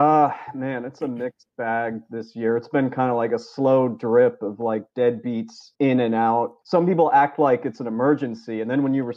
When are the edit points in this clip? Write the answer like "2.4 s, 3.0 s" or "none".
5.7 s, 6.6 s